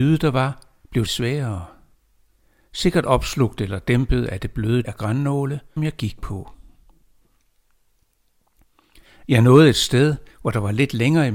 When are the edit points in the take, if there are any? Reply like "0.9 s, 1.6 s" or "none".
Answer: 1.1 s, 4.8 s, 5.8 s